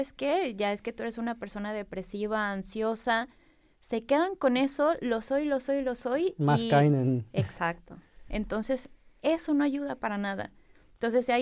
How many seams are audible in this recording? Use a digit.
0